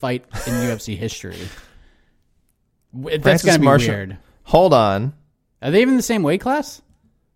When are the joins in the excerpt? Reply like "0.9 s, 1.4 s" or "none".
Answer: none